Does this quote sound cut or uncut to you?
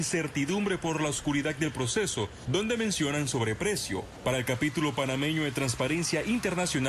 uncut